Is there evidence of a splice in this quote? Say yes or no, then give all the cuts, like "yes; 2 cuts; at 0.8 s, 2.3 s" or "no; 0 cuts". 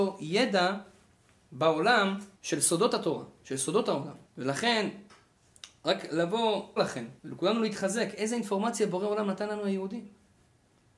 yes; 4 cuts; at 2.3 s, 4.3 s, 6.8 s, 7.2 s